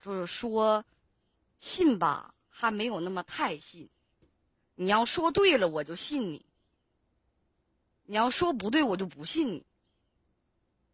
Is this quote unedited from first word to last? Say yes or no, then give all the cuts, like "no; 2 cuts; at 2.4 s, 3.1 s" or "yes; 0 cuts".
yes; 0 cuts